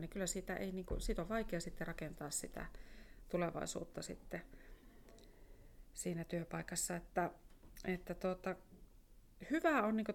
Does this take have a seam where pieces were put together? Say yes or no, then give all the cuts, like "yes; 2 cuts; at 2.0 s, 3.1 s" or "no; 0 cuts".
no; 0 cuts